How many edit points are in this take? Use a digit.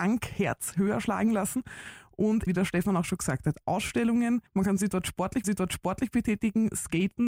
3